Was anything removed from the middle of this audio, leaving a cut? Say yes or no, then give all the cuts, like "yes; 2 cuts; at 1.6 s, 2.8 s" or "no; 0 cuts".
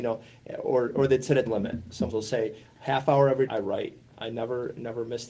yes; 4 cuts; at 1.5 s, 2.1 s, 3.5 s, 4.0 s